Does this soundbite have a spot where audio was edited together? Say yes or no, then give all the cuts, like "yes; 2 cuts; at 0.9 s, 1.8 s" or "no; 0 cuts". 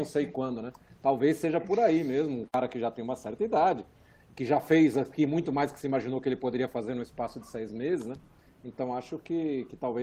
no; 0 cuts